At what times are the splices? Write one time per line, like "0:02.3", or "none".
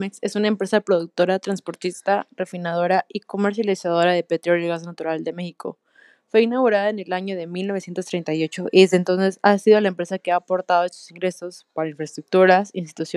none